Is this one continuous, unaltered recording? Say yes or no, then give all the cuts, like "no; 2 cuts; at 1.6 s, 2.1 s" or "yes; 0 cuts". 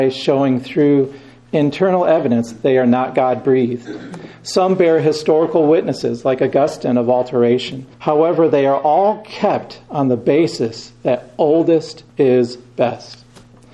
no; 2 cuts; at 7.9 s, 12.1 s